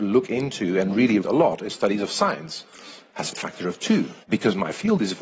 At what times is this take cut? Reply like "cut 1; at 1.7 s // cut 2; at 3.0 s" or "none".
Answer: cut 1; at 1.2 s // cut 2; at 1.7 s // cut 3; at 2.7 s // cut 4; at 3.3 s // cut 5; at 4.2 s